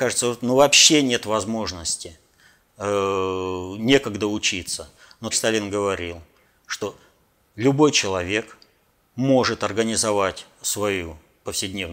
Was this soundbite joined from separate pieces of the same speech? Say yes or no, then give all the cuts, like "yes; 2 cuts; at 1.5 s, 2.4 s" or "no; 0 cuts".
yes; 1 cut; at 5.3 s